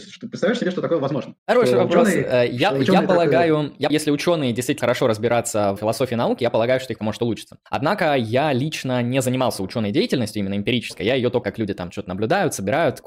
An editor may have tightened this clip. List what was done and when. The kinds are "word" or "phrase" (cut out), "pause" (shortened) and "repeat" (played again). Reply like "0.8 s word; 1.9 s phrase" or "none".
1.4 s pause; 3.9 s word; 4.8 s word; 5.8 s word; 7.0 s word; 7.7 s pause; 11.4 s word